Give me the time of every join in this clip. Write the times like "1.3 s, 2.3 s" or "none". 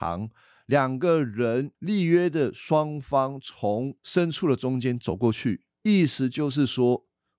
1.7 s, 4.0 s, 5.7 s